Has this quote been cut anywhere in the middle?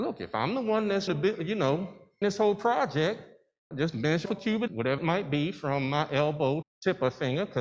yes; 7 cuts; at 1.1 s, 2.2 s, 3.7 s, 4.2 s, 4.7 s, 5.0 s, 6.6 s

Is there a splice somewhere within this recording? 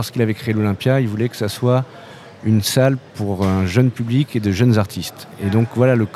no; 0 cuts

